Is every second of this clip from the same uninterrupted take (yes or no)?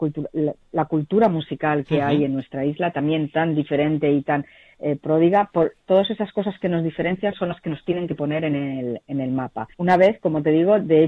no